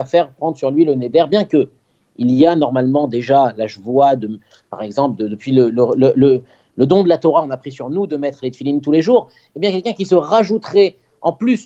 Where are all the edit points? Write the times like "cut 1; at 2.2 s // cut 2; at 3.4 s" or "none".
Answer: none